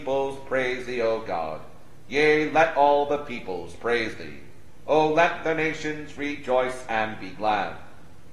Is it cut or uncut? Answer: uncut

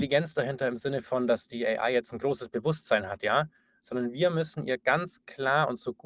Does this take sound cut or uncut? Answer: uncut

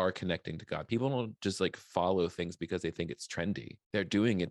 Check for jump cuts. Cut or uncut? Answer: uncut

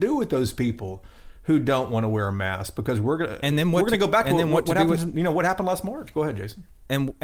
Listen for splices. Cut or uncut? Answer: uncut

